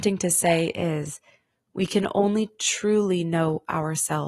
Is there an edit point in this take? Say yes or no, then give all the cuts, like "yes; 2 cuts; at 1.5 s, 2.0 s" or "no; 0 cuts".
no; 0 cuts